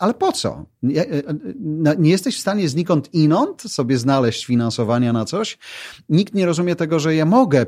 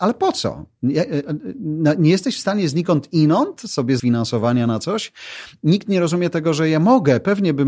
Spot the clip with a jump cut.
second; 1 cut; at 4.0 s

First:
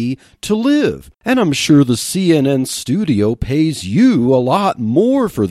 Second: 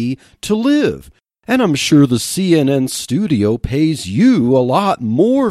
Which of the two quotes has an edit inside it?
first; 1 cut; at 1.1 s

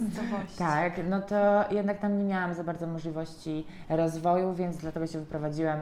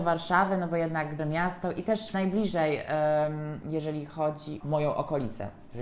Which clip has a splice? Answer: second; 3 cuts; at 1.2 s, 2.1 s, 4.6 s

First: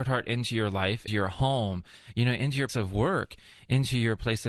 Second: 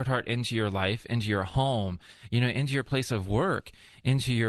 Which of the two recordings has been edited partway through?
first; 2 cuts; at 1.1 s, 2.7 s

